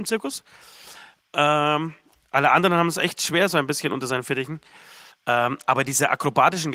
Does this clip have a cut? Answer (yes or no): no